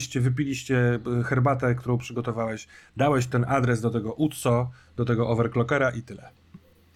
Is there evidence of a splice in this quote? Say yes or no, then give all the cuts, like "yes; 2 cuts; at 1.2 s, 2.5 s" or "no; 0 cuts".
no; 0 cuts